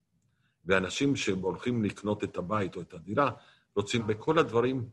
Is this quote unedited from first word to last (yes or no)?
no